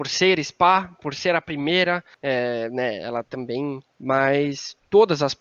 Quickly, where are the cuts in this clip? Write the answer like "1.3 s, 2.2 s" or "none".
2.1 s, 3.9 s